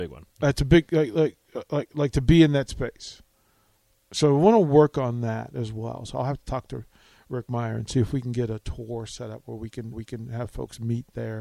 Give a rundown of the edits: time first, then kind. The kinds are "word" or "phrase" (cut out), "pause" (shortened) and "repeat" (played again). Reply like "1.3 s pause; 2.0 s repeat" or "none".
9.9 s repeat